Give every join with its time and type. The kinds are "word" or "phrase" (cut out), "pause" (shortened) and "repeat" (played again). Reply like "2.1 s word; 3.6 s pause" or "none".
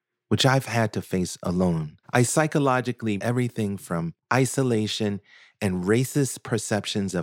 2.0 s pause; 3.2 s word; 4.2 s pause